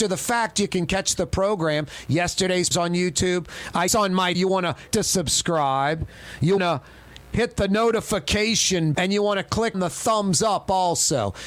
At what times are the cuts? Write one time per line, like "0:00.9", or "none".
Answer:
0:02.7
0:03.9
0:04.3
0:04.9
0:06.6
0:08.9
0:09.7